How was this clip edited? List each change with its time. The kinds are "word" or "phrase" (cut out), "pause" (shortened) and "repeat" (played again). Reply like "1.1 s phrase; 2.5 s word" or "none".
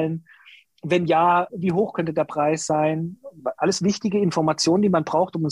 1.5 s word